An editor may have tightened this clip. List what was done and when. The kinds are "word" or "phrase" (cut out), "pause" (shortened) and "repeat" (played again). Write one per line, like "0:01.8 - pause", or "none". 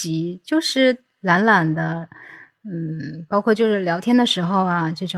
none

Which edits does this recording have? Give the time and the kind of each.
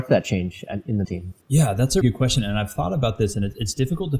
0:01.0 - word
0:01.4 - pause
0:02.0 - word

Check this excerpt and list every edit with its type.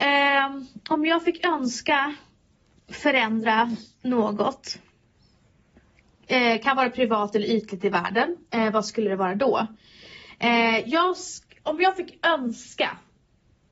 none

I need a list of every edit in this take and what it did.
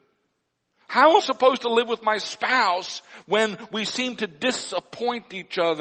0:01.2 - phrase

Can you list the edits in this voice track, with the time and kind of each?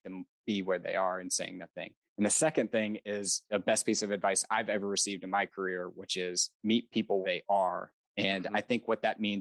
0:02.0 - pause
0:07.2 - word
0:08.0 - pause

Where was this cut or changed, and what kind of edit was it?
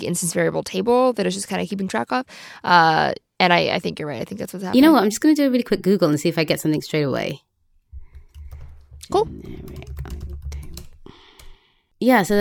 none

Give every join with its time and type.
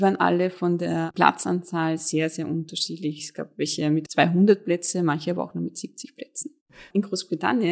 none

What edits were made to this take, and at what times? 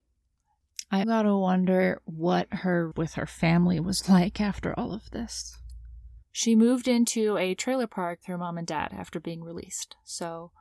0:01.0 - word
0:02.9 - word
0:06.2 - pause
0:08.2 - word

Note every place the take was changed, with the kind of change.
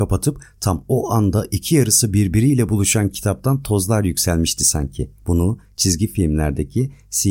0:05.2 - pause

